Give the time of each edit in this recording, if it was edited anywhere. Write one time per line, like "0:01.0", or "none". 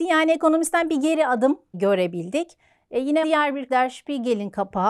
0:01.7
0:03.2
0:03.7